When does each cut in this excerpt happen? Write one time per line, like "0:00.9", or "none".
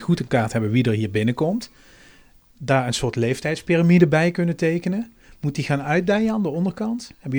none